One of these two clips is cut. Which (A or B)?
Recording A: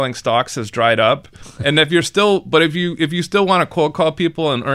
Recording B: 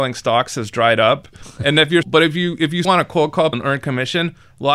B